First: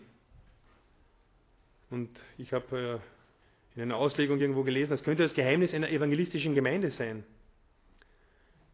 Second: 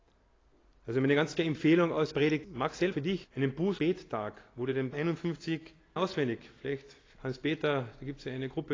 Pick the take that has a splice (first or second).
second